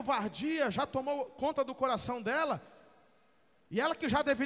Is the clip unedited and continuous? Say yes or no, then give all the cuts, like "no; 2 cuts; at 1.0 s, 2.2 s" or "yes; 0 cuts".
yes; 0 cuts